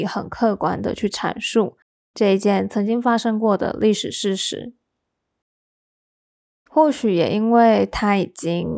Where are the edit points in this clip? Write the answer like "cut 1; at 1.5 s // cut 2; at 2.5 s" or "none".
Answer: none